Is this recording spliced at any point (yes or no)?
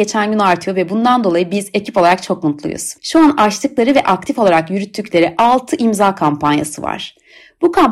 yes